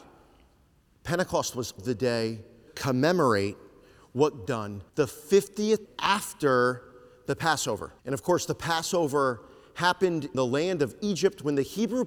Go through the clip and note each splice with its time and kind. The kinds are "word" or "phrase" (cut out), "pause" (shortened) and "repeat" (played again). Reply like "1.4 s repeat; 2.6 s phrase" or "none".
1.8 s word; 2.7 s word; 4.5 s phrase; 4.9 s pause; 5.8 s word; 8.0 s pause; 10.3 s word